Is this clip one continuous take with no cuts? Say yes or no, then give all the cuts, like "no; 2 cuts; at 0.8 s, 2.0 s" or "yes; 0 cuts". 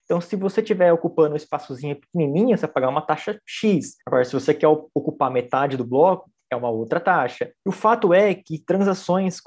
no; 2 cuts; at 4.0 s, 7.6 s